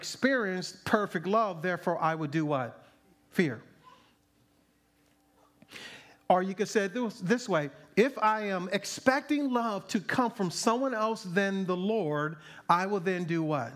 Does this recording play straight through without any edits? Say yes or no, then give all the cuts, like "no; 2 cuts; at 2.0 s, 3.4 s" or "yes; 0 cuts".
no; 1 cut; at 3.1 s